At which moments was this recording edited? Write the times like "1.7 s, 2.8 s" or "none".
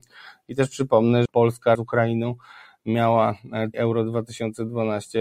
1.3 s, 1.7 s, 3.7 s